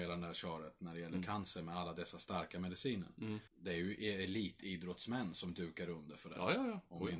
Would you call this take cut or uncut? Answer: cut